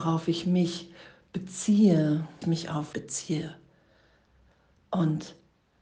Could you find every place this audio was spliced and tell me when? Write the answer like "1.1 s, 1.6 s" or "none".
2.4 s, 2.9 s